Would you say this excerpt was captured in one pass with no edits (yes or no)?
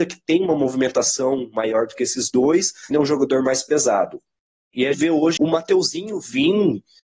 no